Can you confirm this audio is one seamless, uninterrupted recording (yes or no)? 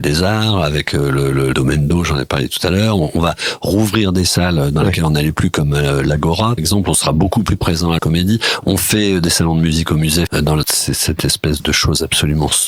no